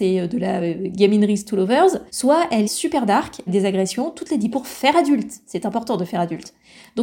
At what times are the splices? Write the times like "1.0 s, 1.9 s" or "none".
2.1 s, 2.6 s, 3.5 s, 4.5 s